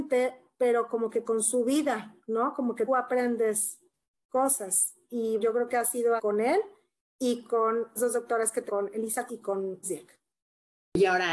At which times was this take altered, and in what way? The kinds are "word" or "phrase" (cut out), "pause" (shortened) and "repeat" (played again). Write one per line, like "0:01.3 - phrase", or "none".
0:02.9 - word
0:05.4 - word
0:06.2 - word
0:08.0 - word
0:08.7 - word
0:09.3 - word
0:09.8 - word